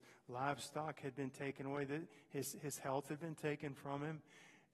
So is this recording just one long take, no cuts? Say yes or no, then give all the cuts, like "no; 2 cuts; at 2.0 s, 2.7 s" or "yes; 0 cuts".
yes; 0 cuts